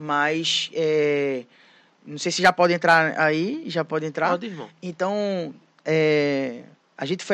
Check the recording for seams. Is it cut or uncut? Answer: uncut